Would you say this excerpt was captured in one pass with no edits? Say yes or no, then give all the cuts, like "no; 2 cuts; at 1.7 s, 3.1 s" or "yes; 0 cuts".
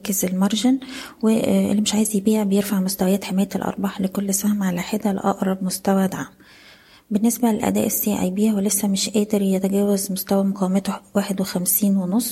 yes; 0 cuts